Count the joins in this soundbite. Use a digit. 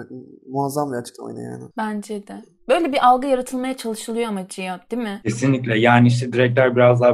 1